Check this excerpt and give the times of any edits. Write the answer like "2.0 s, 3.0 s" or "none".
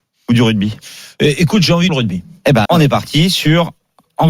1.9 s, 2.7 s